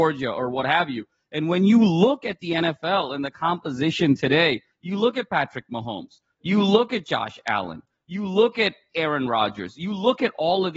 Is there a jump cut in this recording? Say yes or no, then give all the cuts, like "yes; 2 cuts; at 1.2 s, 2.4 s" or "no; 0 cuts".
no; 0 cuts